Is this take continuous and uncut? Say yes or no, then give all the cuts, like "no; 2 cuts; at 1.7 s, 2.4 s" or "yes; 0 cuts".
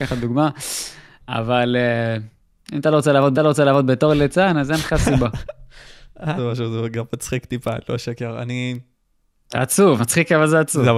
no; 3 cuts; at 3.3 s, 6.4 s, 10.0 s